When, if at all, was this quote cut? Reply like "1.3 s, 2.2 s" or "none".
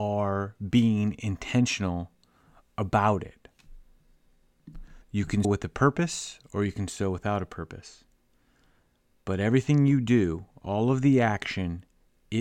5.0 s, 5.4 s